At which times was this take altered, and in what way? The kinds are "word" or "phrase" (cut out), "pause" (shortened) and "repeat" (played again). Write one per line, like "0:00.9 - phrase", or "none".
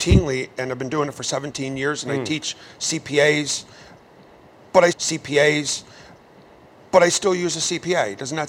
0:04.9 - repeat

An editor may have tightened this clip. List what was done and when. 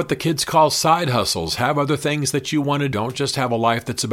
0:02.9 - word

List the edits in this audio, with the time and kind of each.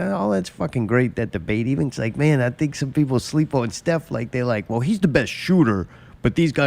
0:01.9 - phrase

